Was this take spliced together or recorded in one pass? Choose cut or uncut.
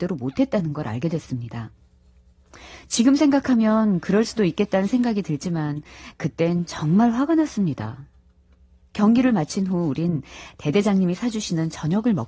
uncut